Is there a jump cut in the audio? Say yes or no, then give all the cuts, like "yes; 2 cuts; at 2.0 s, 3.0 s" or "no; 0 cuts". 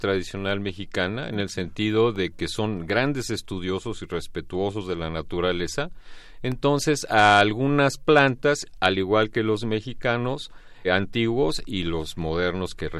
yes; 1 cut; at 10.8 s